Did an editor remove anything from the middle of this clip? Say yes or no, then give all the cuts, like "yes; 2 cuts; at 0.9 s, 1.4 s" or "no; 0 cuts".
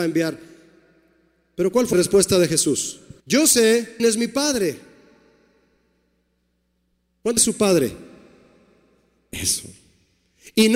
yes; 4 cuts; at 1.9 s, 3.2 s, 4.0 s, 7.4 s